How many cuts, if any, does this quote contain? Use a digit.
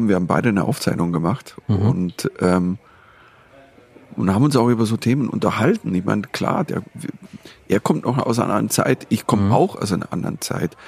0